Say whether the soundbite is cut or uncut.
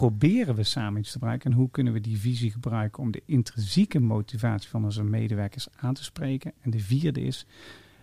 uncut